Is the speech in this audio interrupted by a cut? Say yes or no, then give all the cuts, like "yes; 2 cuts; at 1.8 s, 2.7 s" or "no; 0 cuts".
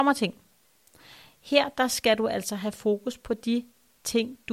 no; 0 cuts